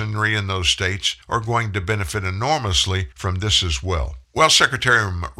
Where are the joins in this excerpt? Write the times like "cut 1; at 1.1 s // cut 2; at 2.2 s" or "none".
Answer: cut 1; at 1.2 s // cut 2; at 3.1 s // cut 3; at 4.2 s